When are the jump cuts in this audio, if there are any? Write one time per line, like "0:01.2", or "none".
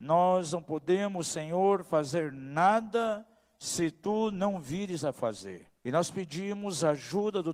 0:05.8